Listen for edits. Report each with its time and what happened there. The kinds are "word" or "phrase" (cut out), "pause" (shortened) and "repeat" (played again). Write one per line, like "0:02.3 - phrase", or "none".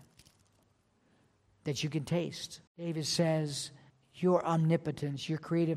0:02.7 - pause
0:03.9 - pause